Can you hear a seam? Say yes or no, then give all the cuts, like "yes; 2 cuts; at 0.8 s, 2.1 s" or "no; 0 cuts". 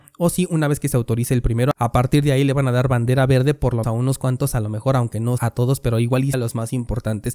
yes; 3 cuts; at 3.8 s, 5.4 s, 6.3 s